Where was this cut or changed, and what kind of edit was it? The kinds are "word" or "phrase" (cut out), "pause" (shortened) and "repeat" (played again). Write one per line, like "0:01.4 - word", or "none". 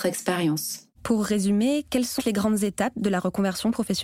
0:00.9 - pause
0:02.2 - word

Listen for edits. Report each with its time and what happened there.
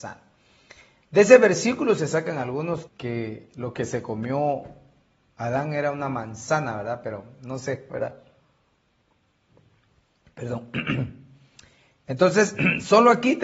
0:02.9 - word

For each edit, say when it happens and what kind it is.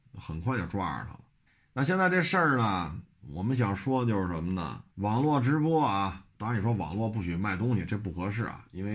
0:01.5 - pause
0:04.9 - pause
0:06.3 - pause

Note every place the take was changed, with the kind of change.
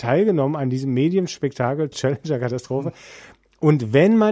0:01.9 - word

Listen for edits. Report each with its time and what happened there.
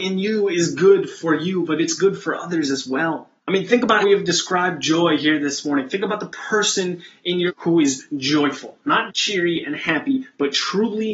0:03.4 - pause
0:04.0 - word
0:07.5 - word
0:09.1 - word

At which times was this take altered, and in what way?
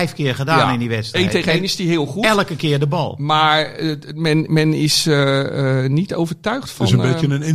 none

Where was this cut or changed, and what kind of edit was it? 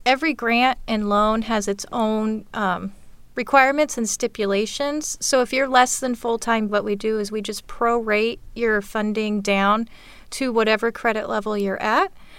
0:06.7 - word

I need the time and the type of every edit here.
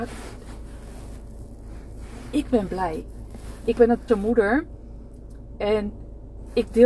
0:04.1 - word

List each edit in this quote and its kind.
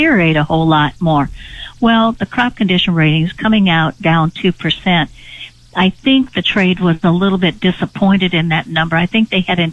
none

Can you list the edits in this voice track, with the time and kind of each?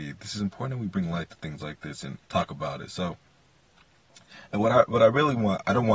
0:02.2 - pause

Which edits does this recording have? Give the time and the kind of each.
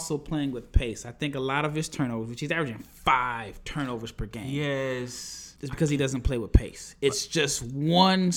0:05.6 - pause

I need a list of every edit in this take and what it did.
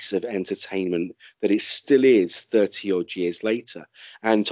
none

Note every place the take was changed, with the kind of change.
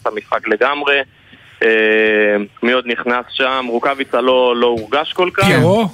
0:02.5 - pause

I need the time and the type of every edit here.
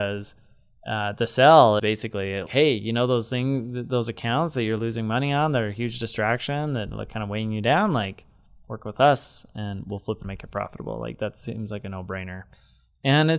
0:01.8 - word
0:02.5 - word
0:10.2 - word

